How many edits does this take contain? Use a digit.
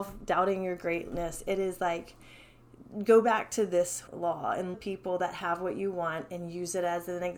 2